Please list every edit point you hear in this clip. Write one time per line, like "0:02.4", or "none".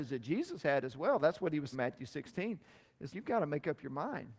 0:01.7
0:03.1